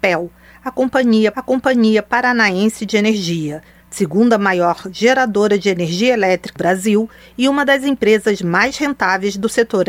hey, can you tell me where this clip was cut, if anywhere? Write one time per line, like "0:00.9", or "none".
0:01.3
0:06.6